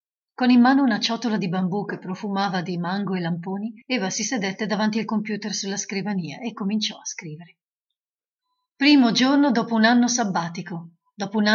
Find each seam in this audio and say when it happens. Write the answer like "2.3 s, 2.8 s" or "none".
3.8 s, 8.4 s